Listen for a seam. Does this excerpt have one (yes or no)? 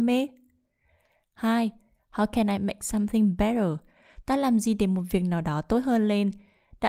no